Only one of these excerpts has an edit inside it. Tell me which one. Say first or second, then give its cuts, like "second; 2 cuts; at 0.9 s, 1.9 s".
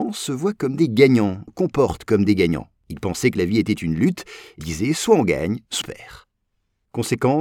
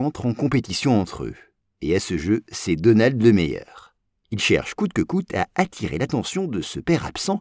first; 4 cuts; at 1.5 s, 2.8 s, 4.6 s, 5.8 s